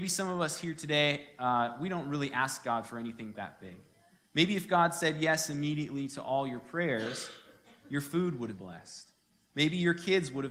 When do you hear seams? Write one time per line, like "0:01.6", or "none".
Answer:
0:03.4
0:08.6